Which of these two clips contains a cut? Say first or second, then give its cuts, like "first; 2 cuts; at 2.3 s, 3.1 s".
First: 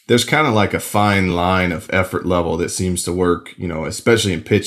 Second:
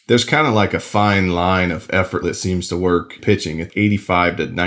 second; 3 cuts; at 2.2 s, 3.2 s, 3.7 s